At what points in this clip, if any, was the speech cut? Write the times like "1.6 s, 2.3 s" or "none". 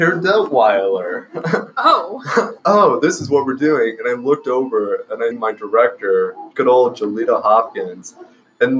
2.6 s, 5.3 s, 6.5 s